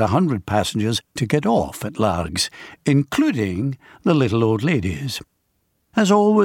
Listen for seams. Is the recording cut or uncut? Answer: cut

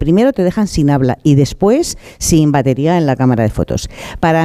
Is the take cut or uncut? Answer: uncut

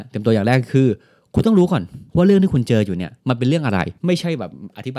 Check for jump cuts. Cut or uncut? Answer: cut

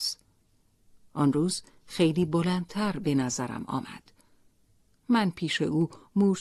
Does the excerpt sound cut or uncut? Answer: uncut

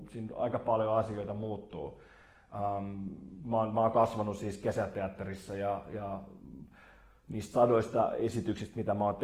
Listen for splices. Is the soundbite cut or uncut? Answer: uncut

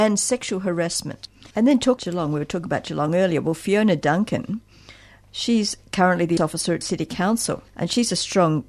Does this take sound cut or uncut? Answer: cut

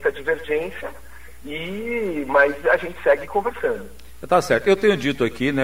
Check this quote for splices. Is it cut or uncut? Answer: uncut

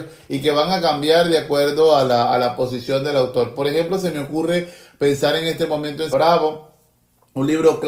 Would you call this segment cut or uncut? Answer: cut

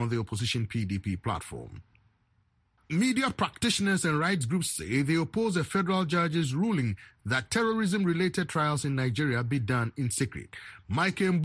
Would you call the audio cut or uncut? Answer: uncut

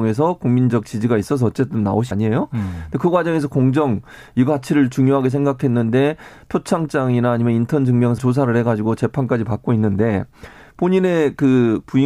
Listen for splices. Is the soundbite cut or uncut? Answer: cut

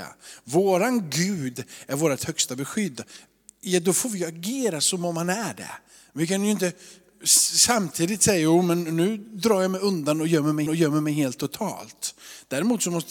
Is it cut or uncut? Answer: cut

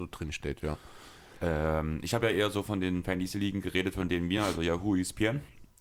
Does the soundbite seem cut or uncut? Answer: uncut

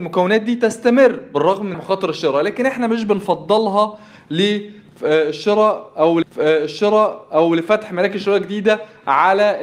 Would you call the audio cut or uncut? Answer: cut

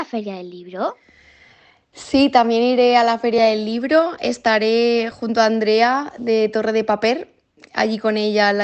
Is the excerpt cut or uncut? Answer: uncut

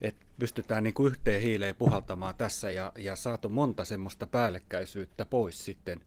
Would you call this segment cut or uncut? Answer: uncut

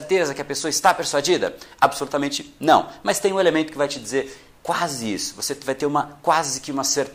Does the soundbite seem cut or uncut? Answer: uncut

